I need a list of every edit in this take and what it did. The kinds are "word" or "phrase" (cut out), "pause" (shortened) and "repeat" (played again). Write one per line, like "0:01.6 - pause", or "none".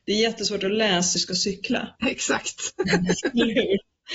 0:01.2 - phrase
0:02.0 - pause